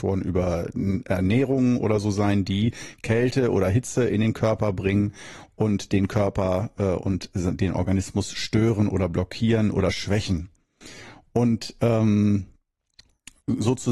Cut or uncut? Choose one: uncut